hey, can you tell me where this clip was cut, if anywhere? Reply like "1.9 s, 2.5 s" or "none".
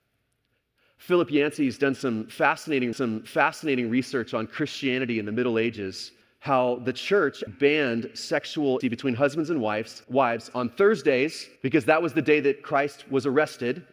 2.9 s, 6.2 s, 7.5 s, 8.8 s, 10.0 s, 11.6 s